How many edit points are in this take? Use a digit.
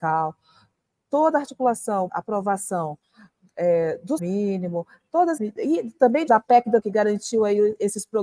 5